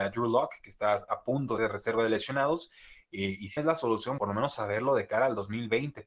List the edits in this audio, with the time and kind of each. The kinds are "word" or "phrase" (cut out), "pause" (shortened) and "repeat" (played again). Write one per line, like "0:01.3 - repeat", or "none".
0:01.6 - word
0:03.6 - word
0:04.2 - word